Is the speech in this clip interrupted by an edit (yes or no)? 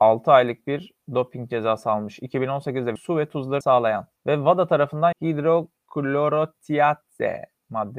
yes